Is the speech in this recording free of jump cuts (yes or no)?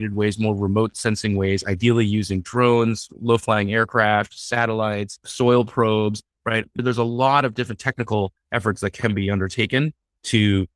yes